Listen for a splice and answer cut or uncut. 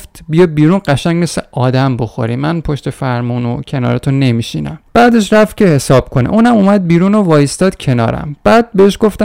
cut